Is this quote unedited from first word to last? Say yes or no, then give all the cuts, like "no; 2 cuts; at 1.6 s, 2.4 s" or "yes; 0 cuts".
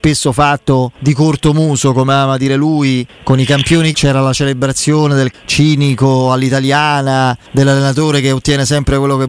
no; 5 cuts; at 1.0 s, 3.1 s, 3.9 s, 5.3 s, 7.5 s